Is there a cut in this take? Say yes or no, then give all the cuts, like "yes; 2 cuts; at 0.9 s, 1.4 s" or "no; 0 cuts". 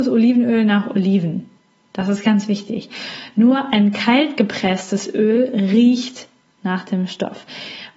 no; 0 cuts